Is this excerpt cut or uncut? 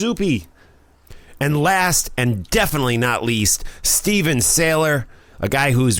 uncut